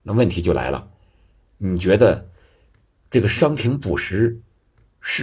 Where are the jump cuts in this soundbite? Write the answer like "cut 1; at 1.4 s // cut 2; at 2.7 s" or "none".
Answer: none